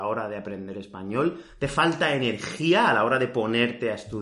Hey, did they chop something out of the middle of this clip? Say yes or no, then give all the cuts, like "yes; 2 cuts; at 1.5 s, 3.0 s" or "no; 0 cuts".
no; 0 cuts